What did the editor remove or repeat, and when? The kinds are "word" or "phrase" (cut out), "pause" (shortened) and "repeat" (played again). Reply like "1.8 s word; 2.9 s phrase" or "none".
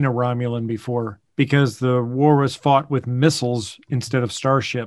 1.3 s pause